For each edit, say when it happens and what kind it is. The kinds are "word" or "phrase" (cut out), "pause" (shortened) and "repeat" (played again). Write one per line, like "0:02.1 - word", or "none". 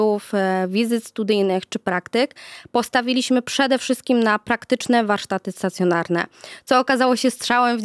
none